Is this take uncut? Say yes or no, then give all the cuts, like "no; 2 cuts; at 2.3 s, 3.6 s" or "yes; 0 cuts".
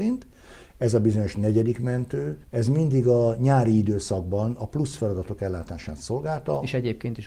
no; 1 cut; at 2.4 s